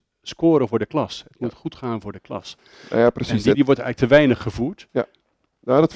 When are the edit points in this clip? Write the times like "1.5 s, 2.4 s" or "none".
3.5 s